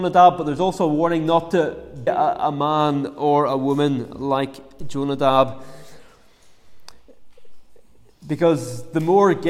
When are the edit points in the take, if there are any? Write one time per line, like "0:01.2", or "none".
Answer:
0:02.1
0:04.8